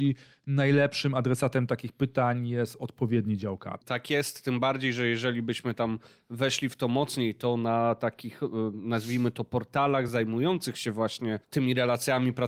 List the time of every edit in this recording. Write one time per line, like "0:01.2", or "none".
none